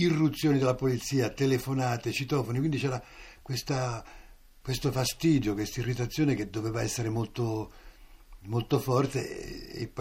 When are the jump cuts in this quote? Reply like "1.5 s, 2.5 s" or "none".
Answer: none